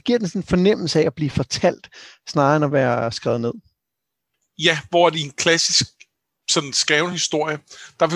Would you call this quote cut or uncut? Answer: uncut